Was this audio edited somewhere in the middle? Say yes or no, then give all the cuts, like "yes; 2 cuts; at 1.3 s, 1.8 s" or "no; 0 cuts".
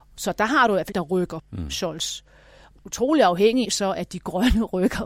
yes; 4 cuts; at 0.9 s, 1.4 s, 2.8 s, 3.6 s